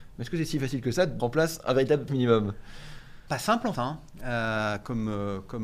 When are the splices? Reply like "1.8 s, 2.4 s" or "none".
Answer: 1.2 s, 2.1 s, 3.3 s, 3.7 s